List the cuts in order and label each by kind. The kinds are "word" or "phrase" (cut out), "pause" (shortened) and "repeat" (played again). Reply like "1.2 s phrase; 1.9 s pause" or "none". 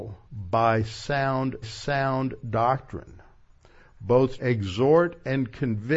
1.6 s repeat; 4.4 s word